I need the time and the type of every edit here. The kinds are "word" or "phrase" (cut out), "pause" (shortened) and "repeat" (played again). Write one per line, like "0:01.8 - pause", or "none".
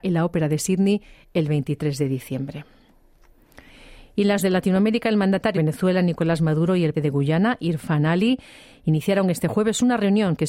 0:04.4 - word
0:05.5 - word
0:06.9 - word